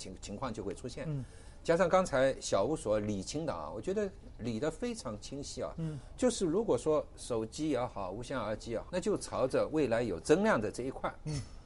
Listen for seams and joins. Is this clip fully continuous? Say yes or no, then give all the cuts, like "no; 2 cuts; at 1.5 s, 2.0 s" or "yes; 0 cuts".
no; 1 cut; at 8.9 s